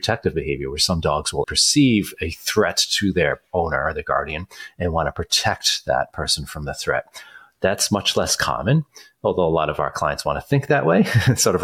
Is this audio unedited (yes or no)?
no